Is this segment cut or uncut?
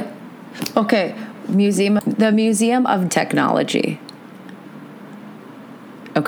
cut